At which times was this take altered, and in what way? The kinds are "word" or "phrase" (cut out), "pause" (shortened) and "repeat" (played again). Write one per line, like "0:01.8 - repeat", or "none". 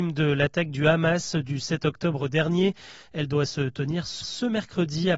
0:04.2 - repeat